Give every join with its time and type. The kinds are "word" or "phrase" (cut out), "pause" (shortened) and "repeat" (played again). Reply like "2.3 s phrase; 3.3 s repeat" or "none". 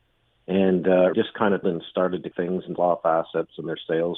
1.1 s word; 1.6 s word; 2.3 s word; 2.8 s word